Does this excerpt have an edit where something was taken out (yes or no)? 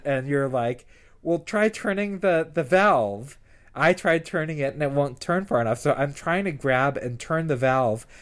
no